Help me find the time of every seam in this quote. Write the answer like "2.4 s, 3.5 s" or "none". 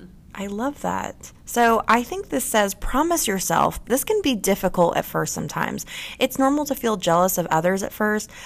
3.8 s